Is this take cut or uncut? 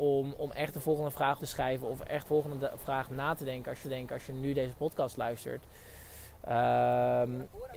cut